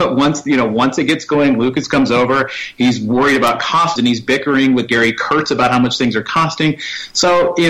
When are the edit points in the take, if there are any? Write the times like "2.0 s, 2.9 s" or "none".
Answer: 4.0 s